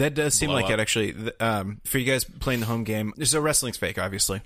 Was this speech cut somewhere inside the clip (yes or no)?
yes